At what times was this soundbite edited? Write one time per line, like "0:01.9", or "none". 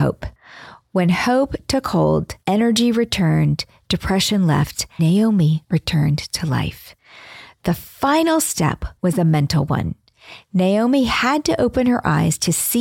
0:05.0